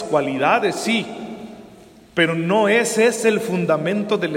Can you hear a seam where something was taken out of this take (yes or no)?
no